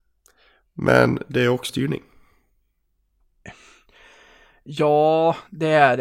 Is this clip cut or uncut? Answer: cut